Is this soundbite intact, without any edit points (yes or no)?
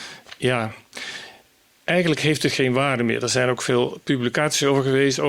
yes